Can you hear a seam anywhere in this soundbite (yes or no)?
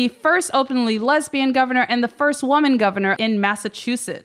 yes